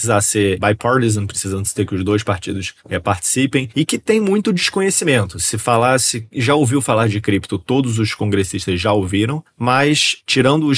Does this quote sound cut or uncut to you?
uncut